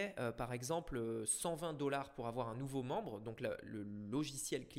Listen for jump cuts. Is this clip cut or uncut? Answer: uncut